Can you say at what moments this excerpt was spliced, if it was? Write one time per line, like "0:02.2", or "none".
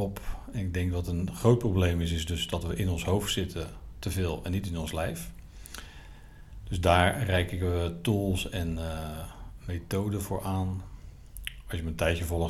none